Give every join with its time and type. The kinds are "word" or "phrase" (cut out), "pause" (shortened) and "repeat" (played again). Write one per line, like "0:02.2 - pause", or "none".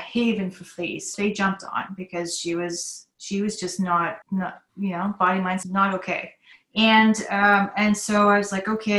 0:01.1 - phrase
0:04.2 - pause
0:05.6 - phrase
0:06.5 - pause

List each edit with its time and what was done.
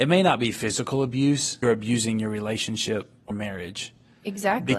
0:01.6 - phrase
0:03.3 - word

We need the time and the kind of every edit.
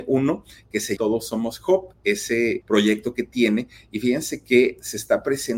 0:01.0 - word
0:02.6 - word

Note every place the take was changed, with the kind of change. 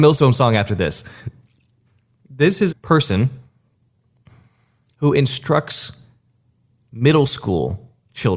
0:02.7 - word

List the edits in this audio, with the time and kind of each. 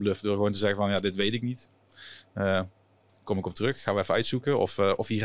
none

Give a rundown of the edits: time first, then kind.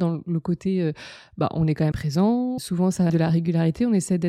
0:01.9 - word
0:02.6 - word
0:03.1 - word

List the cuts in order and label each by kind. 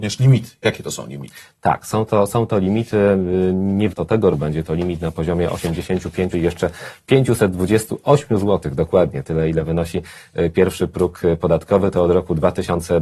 0:03.9 - word
0:04.3 - word
0:06.3 - word

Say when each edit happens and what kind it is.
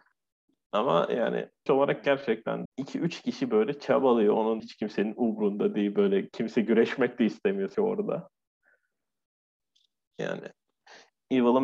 0:01.7 - word
0:02.7 - word
0:04.6 - word
0:07.7 - word

